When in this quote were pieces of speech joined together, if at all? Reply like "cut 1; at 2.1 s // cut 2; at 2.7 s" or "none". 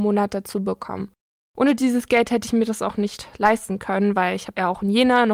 none